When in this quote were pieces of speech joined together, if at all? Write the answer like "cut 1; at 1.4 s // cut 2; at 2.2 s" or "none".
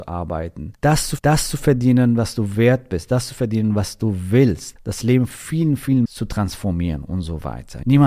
cut 1; at 1.2 s // cut 2; at 2.5 s // cut 3; at 5.3 s // cut 4; at 6.0 s

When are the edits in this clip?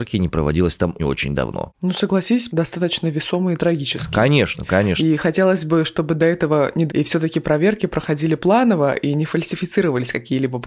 cut 1; at 1.0 s // cut 2; at 2.5 s // cut 3; at 6.9 s

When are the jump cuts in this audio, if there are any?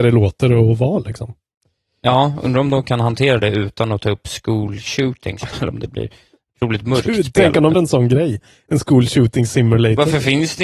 cut 1; at 5.5 s // cut 2; at 7.7 s

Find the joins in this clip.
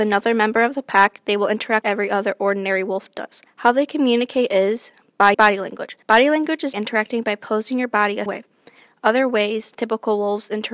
cut 1; at 1.8 s // cut 2; at 3.5 s // cut 3; at 5.3 s // cut 4; at 6.0 s // cut 5; at 6.7 s // cut 6; at 8.3 s

